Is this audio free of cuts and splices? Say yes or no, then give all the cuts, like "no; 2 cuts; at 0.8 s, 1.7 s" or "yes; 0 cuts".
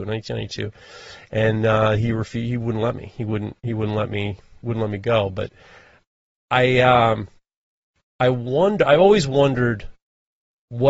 yes; 0 cuts